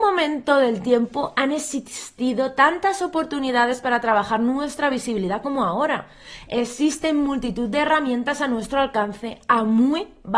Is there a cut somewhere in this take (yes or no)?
no